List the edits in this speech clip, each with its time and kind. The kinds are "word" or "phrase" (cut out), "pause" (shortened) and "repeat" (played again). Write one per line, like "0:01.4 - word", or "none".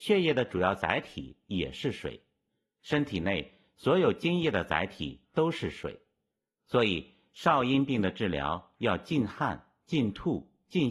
none